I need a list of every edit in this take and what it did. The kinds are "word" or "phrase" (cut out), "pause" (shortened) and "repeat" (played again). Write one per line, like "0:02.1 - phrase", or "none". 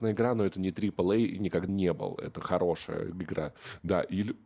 0:01.7 - word